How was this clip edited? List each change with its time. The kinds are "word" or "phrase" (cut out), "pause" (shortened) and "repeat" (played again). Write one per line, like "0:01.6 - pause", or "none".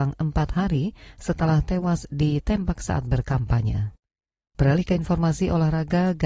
none